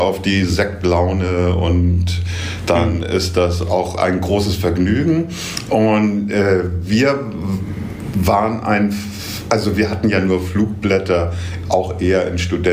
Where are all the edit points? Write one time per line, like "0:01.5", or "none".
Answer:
none